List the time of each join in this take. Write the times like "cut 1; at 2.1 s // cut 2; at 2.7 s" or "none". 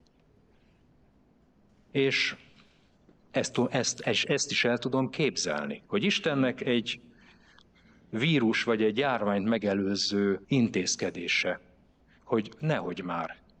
cut 1; at 5.8 s // cut 2; at 10.4 s